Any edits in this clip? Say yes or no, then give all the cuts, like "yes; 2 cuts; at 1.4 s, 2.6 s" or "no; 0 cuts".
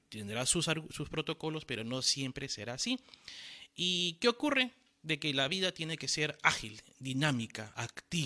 no; 0 cuts